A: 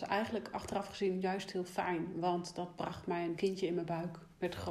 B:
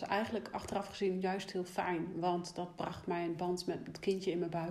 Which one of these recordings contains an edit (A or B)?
A